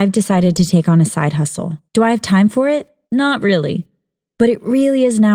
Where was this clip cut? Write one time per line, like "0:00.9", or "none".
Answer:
0:01.9
0:03.0